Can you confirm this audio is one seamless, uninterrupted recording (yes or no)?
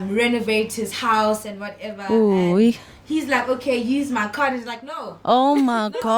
yes